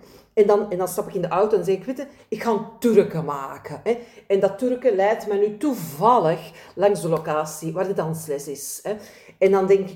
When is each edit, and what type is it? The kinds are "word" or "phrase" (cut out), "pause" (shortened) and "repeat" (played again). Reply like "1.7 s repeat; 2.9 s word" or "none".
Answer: none